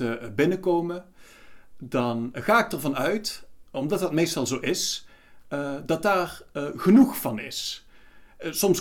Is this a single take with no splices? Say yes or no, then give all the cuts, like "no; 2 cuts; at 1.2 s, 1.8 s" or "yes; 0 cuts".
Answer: yes; 0 cuts